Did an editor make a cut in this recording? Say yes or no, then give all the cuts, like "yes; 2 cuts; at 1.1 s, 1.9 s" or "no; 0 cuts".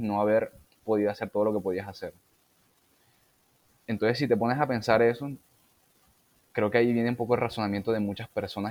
no; 0 cuts